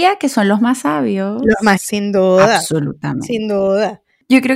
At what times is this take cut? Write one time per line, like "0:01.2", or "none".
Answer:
0:01.8